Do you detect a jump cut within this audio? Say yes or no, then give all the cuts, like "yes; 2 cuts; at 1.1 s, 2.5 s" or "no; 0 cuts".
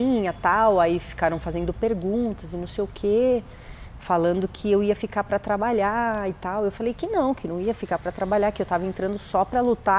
no; 0 cuts